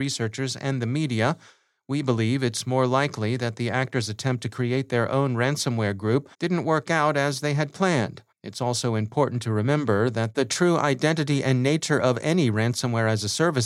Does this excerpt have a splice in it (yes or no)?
yes